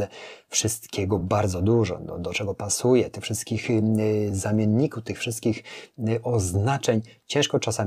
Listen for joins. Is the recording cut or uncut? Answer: uncut